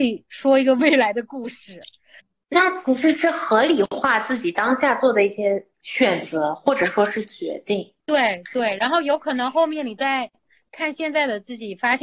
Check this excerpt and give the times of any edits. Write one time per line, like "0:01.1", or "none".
0:02.2
0:05.7